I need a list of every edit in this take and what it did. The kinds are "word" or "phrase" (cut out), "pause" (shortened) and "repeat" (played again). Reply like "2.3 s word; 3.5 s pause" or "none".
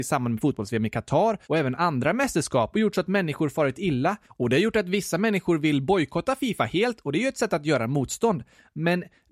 1.4 s pause; 4.2 s pause